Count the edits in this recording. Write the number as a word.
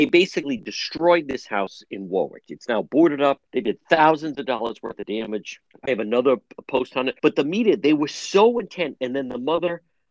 three